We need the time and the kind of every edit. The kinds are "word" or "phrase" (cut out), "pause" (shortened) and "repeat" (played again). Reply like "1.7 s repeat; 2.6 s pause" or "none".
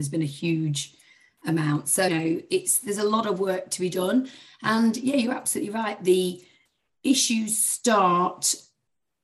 2.1 s word

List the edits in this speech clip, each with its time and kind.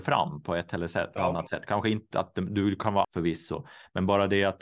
3.0 s word

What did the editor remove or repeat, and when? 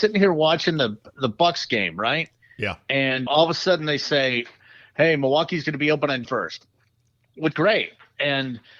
3.3 s word; 6.2 s word; 7.5 s word

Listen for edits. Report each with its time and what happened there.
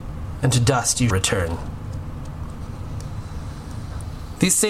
1.1 s word

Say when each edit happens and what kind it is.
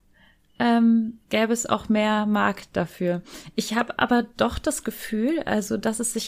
1.2 s pause

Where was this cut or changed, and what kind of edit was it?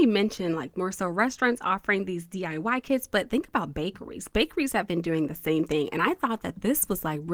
none

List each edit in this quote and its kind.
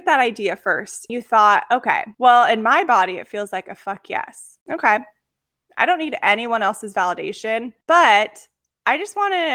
1.1 s word; 2.1 s pause; 4.6 s pause; 7.8 s pause

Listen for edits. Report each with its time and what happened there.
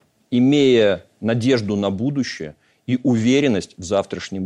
none

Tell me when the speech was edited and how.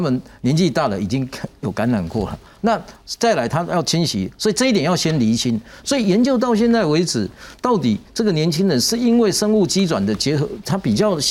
2.6 s word

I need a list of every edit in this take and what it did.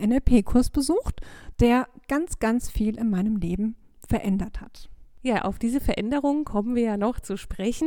5.1 s pause

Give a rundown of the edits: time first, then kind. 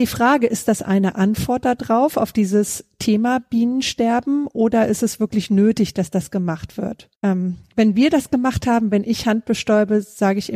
7.2 s pause

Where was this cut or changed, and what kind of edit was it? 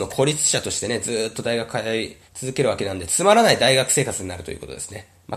2.3 s pause

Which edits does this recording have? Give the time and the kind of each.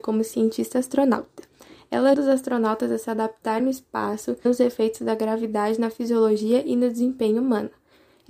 2.1 s word; 3.6 s word; 4.5 s word

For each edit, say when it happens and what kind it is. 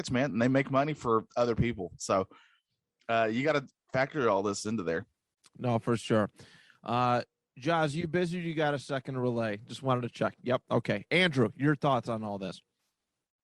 none

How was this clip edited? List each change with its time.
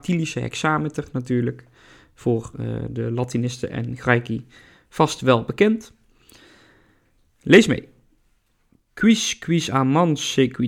none

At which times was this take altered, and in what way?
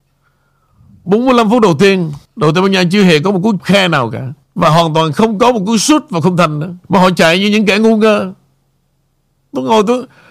2.3 s pause; 3.6 s word; 4.4 s pause; 6.8 s pause

